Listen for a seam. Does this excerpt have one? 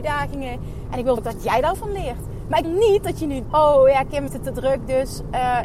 yes; 5 cuts; at 1.2 s, 1.7 s, 2.6 s, 3.4 s, 4.3 s

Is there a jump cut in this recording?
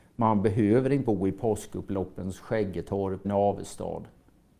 yes; 2 cuts; at 1.0 s, 3.2 s

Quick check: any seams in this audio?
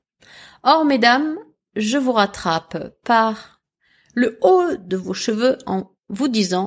no; 0 cuts

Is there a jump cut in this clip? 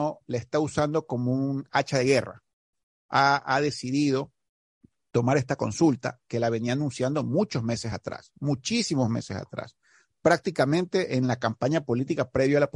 no; 0 cuts

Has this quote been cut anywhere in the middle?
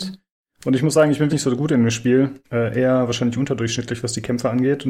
yes; 2 cuts; at 1.3 s, 2.4 s

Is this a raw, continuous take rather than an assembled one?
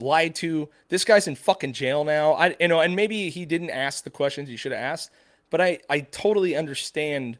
yes; 0 cuts

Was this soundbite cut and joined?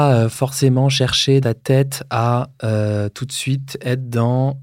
yes; 1 cut; at 1.4 s

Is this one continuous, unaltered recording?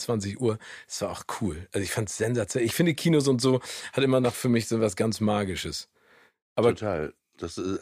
yes; 0 cuts

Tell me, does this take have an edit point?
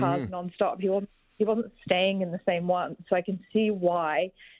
no; 0 cuts

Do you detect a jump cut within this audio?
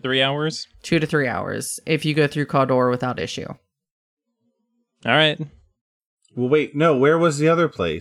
no; 0 cuts

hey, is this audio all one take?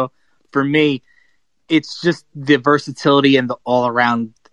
yes; 0 cuts

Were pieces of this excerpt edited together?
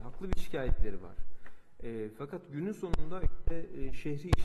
no; 0 cuts

